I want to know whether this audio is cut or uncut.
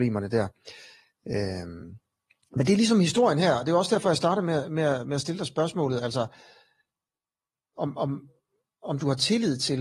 uncut